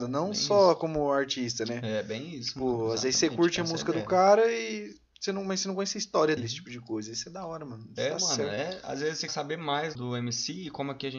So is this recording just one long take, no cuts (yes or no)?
no